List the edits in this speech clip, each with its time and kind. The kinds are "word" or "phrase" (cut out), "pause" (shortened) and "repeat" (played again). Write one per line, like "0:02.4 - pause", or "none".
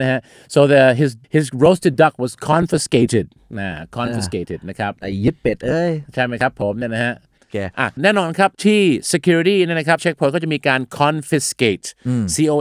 0:01.2 - pause
0:08.0 - word
0:08.5 - pause
0:10.0 - word